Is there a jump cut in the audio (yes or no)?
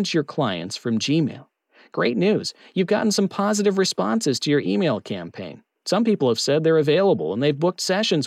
no